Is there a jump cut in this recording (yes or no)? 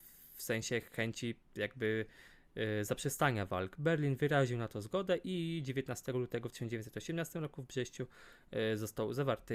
no